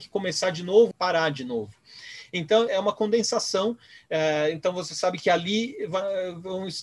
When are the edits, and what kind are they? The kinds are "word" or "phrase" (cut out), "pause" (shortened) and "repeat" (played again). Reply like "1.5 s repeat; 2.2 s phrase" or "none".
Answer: 0.9 s phrase; 2.7 s word